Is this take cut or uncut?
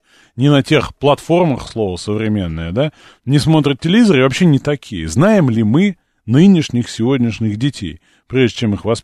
uncut